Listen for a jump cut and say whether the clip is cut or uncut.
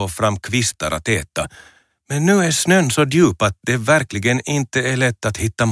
uncut